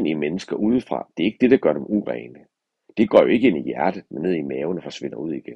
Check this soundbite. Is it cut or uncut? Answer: uncut